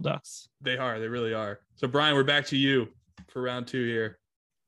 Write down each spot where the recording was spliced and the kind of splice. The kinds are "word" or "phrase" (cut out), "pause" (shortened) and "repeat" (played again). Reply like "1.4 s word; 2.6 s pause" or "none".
1.6 s pause